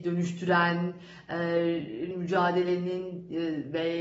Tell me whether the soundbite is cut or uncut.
cut